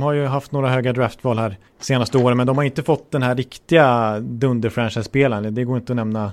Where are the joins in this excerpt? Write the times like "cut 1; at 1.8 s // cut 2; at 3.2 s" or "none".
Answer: cut 1; at 1.7 s